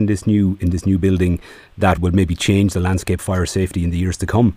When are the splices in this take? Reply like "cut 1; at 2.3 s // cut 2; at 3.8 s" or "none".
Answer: cut 1; at 2.0 s // cut 2; at 3.2 s